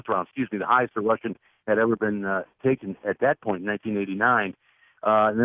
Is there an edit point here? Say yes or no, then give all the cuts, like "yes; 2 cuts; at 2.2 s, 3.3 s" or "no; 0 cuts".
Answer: no; 0 cuts